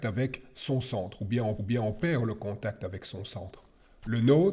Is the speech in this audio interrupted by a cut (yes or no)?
yes